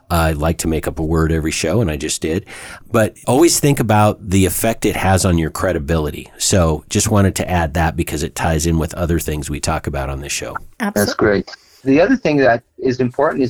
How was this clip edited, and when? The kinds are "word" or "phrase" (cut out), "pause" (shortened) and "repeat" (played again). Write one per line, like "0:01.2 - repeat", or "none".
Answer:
0:10.7 - pause